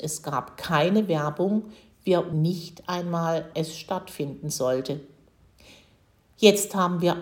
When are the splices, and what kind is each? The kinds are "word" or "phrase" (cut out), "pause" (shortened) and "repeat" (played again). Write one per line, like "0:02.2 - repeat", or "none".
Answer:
0:02.3 - word
0:03.5 - word